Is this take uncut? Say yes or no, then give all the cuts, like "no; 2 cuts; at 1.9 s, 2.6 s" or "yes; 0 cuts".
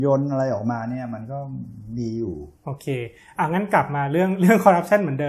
yes; 0 cuts